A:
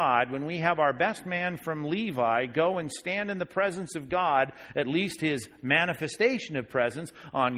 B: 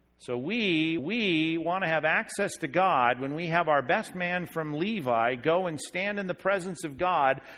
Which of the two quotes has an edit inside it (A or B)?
B